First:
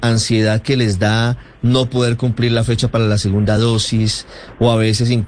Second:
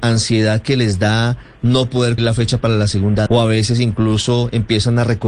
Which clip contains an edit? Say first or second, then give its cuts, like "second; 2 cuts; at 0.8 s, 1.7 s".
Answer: second; 2 cuts; at 2.2 s, 3.3 s